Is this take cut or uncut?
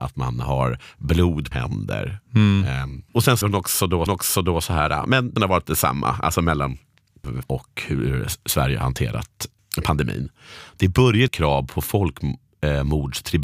cut